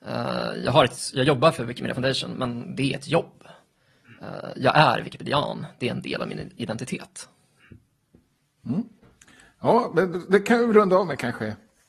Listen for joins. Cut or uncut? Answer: uncut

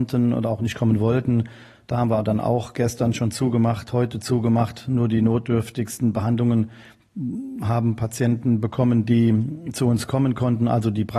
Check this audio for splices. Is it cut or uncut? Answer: uncut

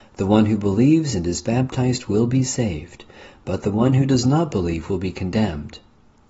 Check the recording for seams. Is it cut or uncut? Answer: uncut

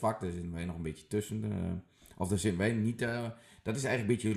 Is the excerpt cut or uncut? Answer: uncut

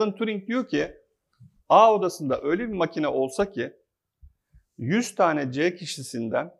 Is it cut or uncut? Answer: uncut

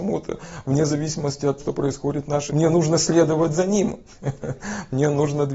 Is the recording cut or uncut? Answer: cut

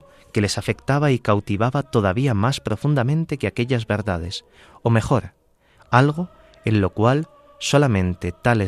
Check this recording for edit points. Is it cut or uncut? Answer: uncut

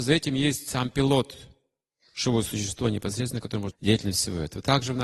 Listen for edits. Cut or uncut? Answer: cut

